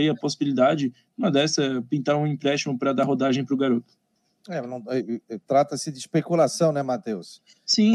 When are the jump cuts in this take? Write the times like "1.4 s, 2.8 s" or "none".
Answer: none